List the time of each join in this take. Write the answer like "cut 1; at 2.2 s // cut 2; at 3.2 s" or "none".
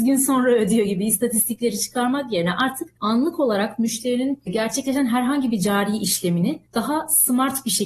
none